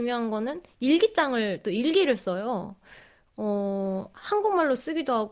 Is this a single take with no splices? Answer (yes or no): yes